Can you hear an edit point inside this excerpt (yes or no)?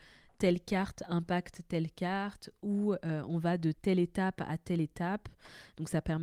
no